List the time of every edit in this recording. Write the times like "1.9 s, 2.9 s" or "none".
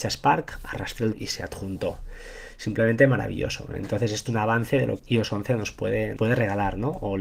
1.1 s, 4.3 s, 5.0 s, 6.2 s